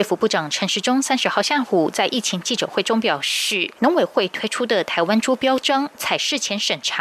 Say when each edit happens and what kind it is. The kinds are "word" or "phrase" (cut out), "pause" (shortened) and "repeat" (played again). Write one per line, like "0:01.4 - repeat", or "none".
0:03.8 - pause